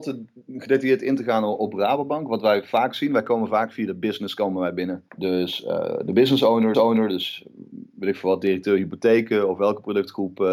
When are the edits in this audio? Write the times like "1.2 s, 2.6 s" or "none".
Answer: 5.1 s, 6.7 s